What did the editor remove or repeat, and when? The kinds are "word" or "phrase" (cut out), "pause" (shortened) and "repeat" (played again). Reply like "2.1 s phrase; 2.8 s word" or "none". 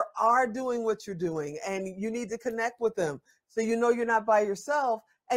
none